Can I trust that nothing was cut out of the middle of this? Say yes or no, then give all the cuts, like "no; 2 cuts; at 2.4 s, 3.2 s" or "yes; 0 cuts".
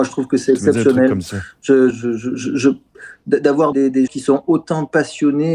no; 3 cuts; at 1.9 s, 3.7 s, 4.1 s